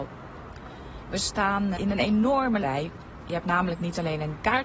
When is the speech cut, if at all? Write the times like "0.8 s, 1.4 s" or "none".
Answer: 1.7 s, 2.6 s